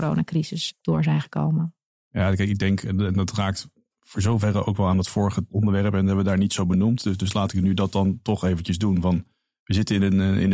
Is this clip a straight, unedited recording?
yes; 0 cuts

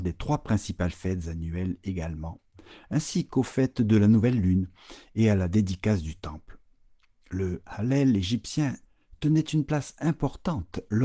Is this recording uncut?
yes; 0 cuts

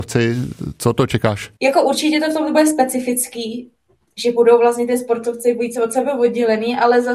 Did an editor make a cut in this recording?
yes; 1 cut; at 1.6 s

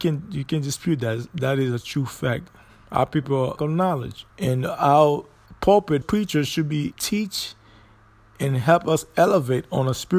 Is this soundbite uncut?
no; 4 cuts; at 3.6 s, 4.3 s, 6.0 s, 6.9 s

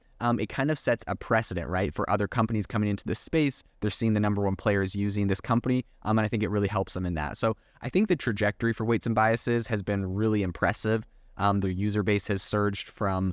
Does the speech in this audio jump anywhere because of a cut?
no; 0 cuts

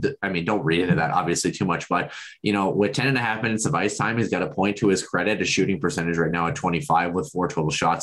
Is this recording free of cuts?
yes; 0 cuts

